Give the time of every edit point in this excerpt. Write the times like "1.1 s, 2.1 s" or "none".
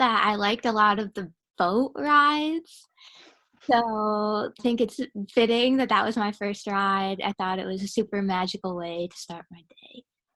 4.6 s